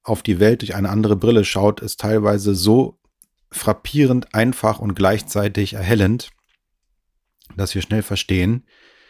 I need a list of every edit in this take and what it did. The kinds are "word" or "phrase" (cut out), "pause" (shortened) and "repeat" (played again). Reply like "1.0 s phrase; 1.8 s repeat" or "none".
none